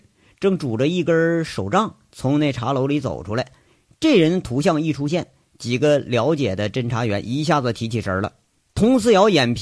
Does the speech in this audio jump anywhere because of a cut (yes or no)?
no